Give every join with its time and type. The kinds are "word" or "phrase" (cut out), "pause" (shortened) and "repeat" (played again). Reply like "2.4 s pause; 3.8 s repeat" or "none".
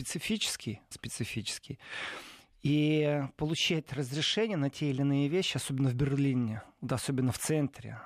0.9 s word